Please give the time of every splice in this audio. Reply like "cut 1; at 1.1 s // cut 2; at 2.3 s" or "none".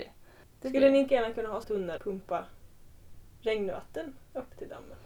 cut 1; at 1.1 s // cut 2; at 1.6 s // cut 3; at 2.0 s